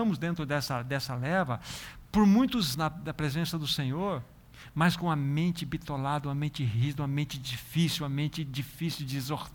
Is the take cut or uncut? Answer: cut